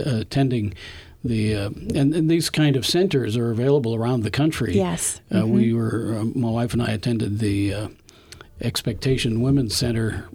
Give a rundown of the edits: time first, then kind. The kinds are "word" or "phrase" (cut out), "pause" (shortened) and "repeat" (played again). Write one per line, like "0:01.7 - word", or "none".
none